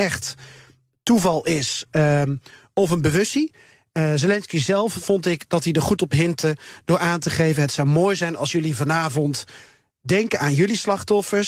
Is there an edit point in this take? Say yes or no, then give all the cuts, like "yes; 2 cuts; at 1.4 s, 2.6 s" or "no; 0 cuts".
no; 0 cuts